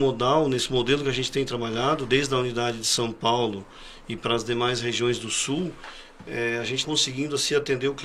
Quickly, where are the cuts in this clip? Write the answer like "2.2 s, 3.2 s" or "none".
6.8 s